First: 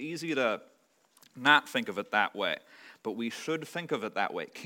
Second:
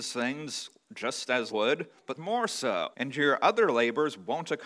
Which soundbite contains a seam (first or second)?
second